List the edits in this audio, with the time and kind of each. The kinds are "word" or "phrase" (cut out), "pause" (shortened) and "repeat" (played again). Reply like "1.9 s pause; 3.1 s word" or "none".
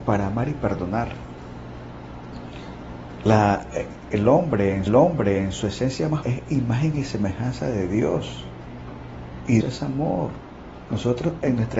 4.9 s repeat; 6.2 s word; 9.6 s word

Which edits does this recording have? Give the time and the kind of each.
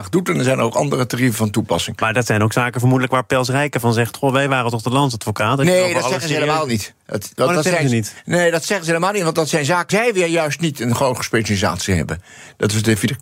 9.9 s word

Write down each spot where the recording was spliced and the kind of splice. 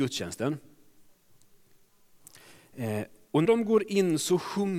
3.4 s word

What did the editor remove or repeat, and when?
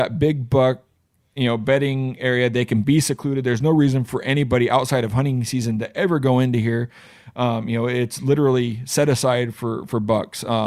none

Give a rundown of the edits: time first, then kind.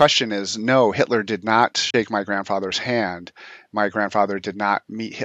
none

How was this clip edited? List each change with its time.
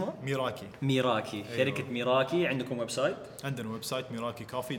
none

